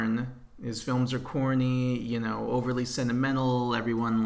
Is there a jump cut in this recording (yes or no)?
no